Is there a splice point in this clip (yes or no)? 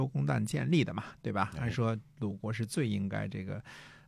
yes